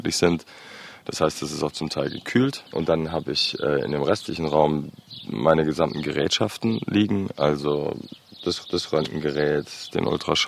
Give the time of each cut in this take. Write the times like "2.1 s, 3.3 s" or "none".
8.6 s